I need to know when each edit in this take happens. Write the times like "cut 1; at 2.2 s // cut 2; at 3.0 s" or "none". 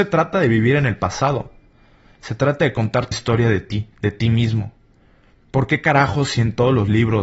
cut 1; at 3.1 s // cut 2; at 3.9 s